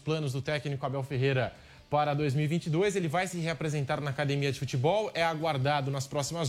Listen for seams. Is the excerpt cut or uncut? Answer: uncut